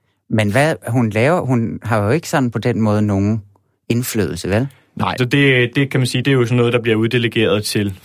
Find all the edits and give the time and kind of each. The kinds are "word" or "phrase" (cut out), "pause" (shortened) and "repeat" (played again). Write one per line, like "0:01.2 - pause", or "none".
0:05.2 - word
0:06.2 - word